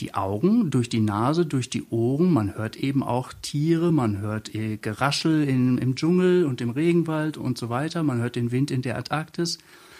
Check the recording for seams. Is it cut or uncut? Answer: uncut